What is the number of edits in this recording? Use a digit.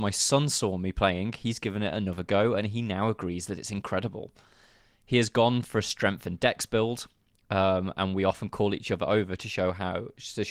0